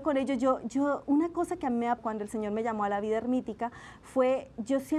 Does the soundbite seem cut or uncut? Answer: cut